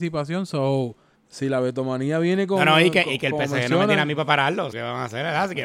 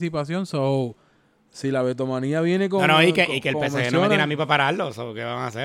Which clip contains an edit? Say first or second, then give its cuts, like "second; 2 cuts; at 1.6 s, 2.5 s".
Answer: first; 2 cuts; at 1.1 s, 4.7 s